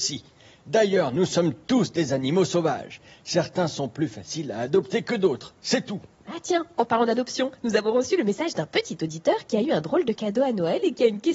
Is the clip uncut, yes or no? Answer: yes